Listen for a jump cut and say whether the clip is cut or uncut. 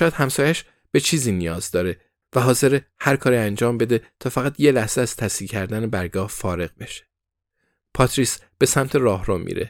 uncut